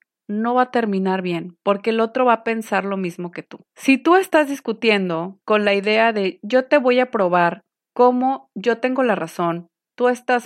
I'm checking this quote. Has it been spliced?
yes; 2 cuts; at 3.7 s, 5.4 s

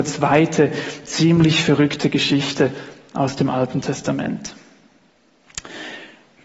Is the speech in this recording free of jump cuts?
yes; 0 cuts

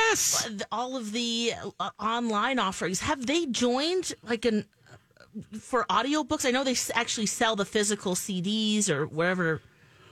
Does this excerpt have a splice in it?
no; 0 cuts

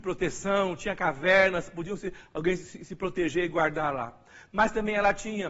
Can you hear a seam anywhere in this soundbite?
no; 0 cuts

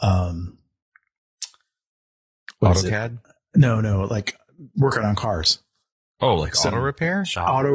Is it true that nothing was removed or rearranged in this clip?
yes; 0 cuts

